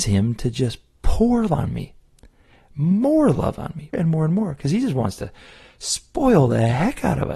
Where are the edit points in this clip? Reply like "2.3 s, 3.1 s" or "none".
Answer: 1.5 s, 3.9 s